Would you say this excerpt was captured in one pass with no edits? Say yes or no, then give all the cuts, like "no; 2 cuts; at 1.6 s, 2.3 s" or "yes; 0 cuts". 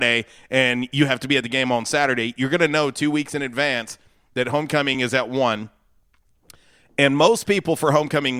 yes; 0 cuts